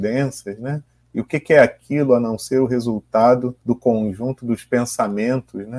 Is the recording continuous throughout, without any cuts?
no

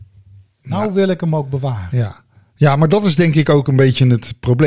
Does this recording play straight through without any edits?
yes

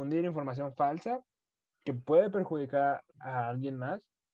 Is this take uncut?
yes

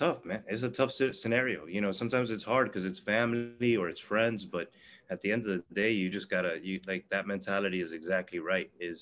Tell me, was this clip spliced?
no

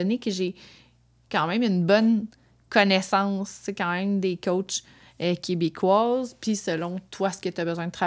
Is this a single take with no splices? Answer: yes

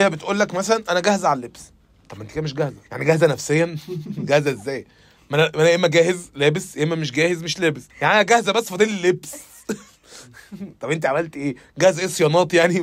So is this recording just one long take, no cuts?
no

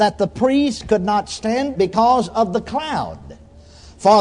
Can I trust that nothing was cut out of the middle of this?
no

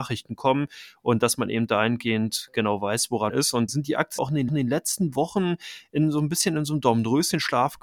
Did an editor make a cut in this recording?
yes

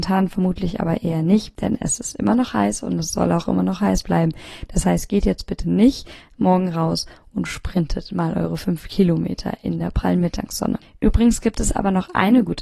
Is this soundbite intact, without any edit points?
yes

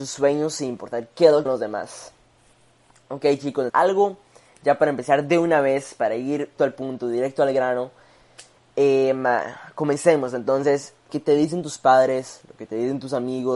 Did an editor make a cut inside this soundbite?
yes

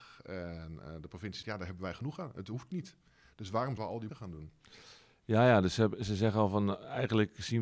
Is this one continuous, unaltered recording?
no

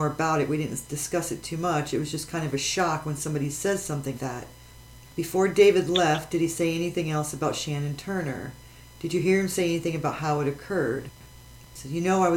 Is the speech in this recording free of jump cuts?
no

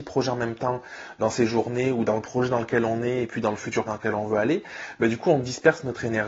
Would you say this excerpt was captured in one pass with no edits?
no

